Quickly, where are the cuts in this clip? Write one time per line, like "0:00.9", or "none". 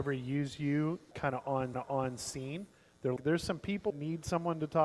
0:01.1
0:01.7
0:03.2
0:03.9